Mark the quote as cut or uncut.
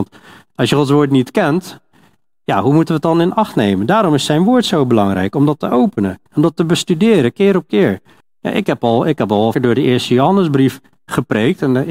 cut